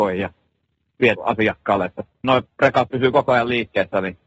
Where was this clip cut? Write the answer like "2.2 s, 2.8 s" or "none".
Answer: 1.2 s, 2.2 s